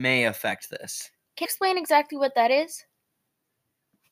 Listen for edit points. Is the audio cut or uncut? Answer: cut